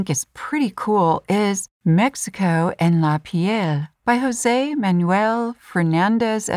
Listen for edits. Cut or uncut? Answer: uncut